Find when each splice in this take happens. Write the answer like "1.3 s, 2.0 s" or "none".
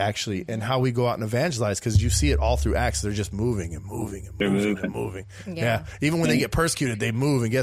none